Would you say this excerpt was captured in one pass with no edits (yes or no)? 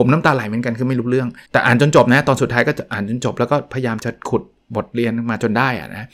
no